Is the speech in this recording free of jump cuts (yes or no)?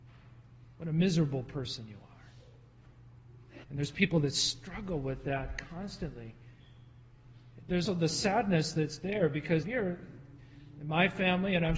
no